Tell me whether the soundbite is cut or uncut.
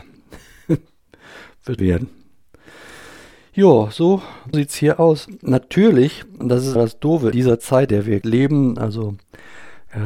cut